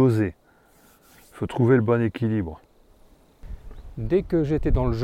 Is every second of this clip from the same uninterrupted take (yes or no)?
yes